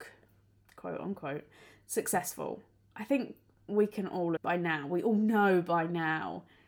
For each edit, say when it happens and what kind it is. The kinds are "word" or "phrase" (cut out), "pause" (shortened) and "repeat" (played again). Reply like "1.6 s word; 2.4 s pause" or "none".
4.4 s word